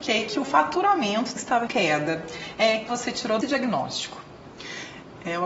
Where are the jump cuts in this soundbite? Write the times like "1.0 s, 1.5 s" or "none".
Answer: 1.4 s, 1.7 s, 2.9 s, 3.4 s